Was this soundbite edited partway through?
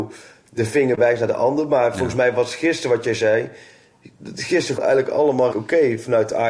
yes; 2 cuts; at 4.8 s, 5.5 s

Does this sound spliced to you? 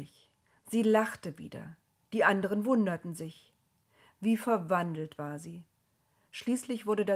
no; 0 cuts

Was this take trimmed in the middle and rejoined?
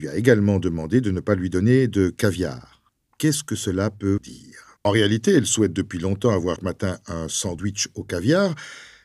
yes; 3 cuts; at 4.2 s, 4.8 s, 6.6 s

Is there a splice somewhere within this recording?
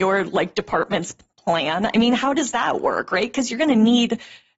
no; 0 cuts

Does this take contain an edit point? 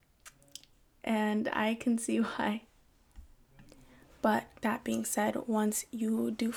yes; 1 cut; at 4.6 s

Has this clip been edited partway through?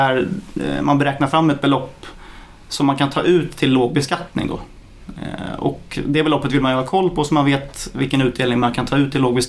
no; 0 cuts

